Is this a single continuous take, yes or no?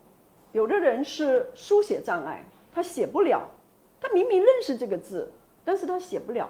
yes